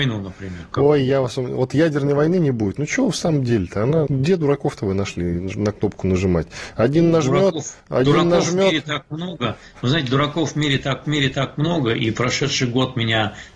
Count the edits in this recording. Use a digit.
3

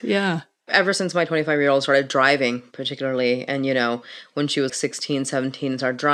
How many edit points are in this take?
1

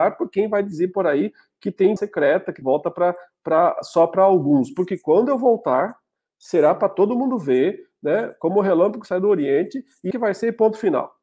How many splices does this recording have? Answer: 3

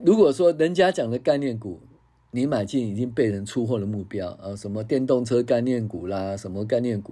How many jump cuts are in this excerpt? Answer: 0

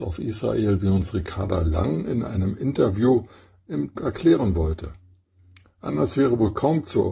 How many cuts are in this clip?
1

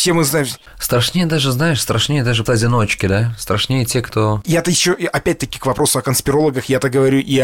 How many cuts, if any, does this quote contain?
1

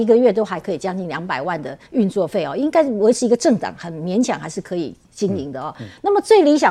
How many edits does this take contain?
1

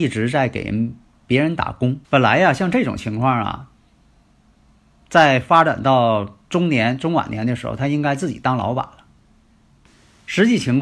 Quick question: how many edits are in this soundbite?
1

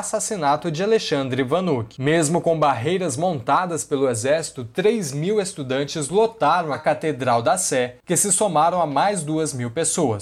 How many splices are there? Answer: 0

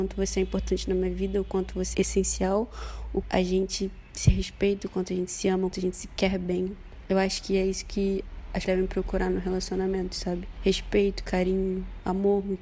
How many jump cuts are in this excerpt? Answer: 4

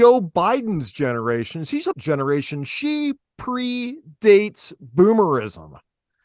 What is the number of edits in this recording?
1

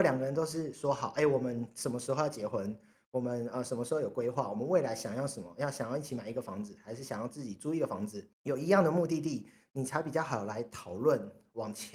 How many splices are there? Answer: 1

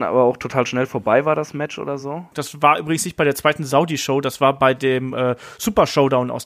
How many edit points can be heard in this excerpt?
0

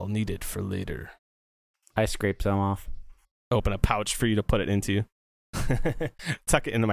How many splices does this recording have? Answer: 0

